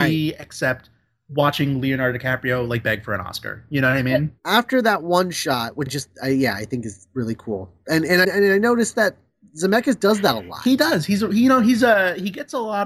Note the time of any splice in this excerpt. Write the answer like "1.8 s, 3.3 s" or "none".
5.9 s, 8.2 s